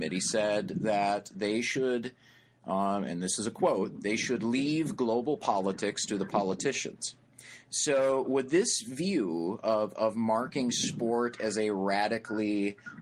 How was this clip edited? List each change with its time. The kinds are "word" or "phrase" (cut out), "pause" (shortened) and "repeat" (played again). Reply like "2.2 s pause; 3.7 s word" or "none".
none